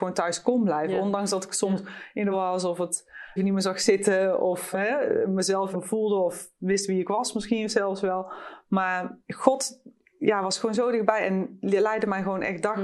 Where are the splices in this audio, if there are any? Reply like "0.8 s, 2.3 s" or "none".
2.3 s, 3.4 s, 4.7 s, 5.7 s, 9.2 s